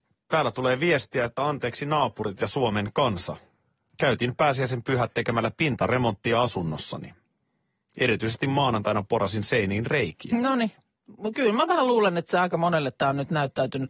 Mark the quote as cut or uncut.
uncut